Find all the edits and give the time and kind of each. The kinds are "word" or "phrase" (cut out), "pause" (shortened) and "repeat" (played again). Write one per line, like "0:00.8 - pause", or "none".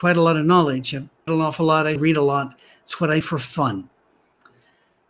0:01.3 - word
0:02.0 - word
0:03.2 - word